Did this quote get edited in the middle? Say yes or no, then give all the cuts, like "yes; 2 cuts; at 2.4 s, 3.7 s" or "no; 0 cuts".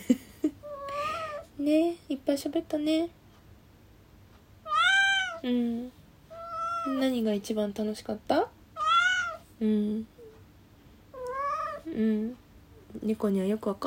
yes; 1 cut; at 2.0 s